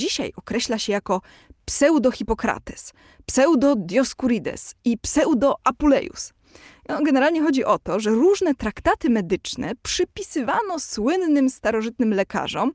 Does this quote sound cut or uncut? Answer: uncut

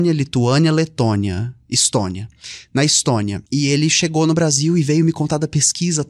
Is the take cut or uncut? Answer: cut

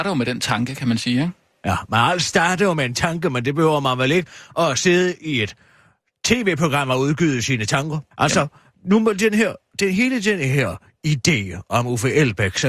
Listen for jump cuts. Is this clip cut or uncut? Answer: cut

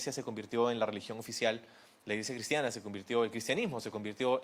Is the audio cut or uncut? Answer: uncut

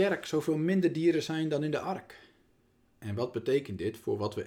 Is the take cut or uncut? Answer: uncut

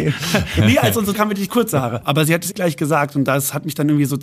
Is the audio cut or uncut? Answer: cut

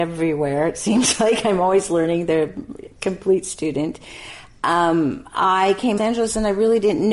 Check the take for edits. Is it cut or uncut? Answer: cut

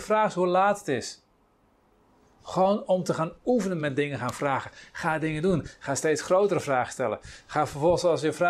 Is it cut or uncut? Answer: uncut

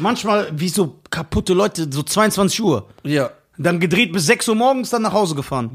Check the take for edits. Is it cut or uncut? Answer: uncut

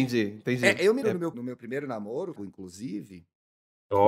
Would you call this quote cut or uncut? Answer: cut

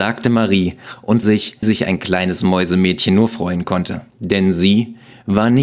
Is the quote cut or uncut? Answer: cut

